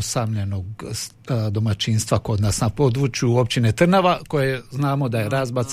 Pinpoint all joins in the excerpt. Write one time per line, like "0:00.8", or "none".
none